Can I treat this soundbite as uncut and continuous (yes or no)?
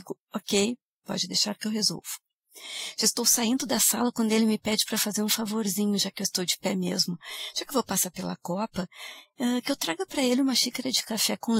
yes